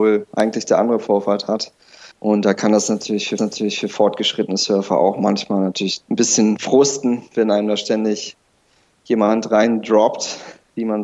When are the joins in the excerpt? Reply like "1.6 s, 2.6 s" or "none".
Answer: 2.1 s, 3.4 s